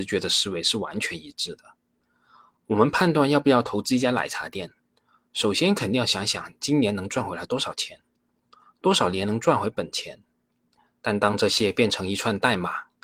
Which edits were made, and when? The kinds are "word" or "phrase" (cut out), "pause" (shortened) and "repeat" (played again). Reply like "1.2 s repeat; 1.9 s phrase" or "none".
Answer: none